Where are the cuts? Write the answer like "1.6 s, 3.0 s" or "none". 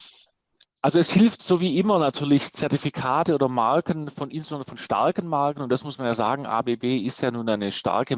none